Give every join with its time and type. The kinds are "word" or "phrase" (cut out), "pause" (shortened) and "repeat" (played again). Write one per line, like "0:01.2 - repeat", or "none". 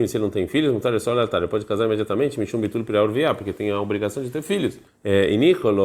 0:04.9 - pause